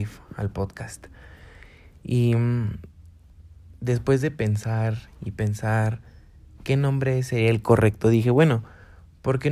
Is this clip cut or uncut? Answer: uncut